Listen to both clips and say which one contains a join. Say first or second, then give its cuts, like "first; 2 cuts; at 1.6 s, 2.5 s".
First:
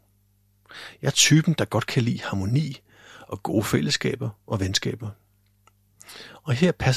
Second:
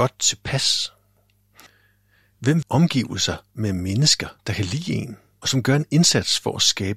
second; 3 cuts; at 2.6 s, 4.4 s, 5.4 s